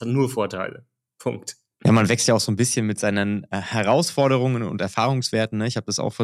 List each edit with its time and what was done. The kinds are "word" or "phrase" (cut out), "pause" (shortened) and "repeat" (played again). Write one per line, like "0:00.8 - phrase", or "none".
none